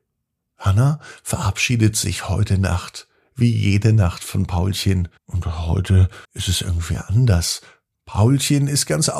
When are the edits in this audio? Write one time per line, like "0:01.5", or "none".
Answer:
0:05.2
0:06.2